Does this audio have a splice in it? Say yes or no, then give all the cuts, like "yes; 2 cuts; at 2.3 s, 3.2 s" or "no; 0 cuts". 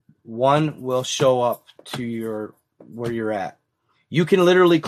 no; 0 cuts